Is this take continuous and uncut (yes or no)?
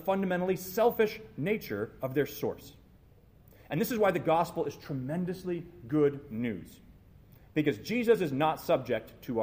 yes